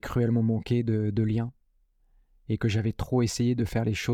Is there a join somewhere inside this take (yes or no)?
no